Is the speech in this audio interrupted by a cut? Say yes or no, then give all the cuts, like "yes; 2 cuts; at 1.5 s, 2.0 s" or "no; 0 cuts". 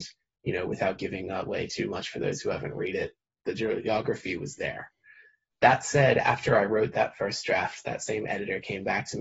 no; 0 cuts